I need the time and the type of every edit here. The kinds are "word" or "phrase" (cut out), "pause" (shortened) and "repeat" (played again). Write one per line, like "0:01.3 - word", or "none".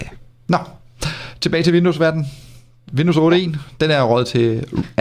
none